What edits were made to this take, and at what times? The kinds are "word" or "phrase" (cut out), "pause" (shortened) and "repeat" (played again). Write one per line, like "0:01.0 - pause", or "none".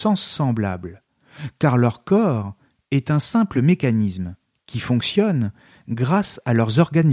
none